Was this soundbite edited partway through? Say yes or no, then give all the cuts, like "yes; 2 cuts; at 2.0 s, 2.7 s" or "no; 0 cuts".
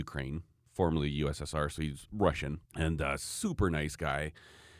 yes; 1 cut; at 2.7 s